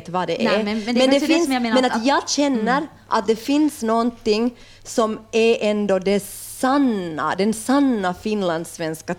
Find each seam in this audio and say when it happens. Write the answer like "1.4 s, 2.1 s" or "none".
none